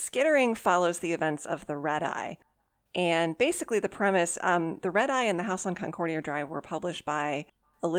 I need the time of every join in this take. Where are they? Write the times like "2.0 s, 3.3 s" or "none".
none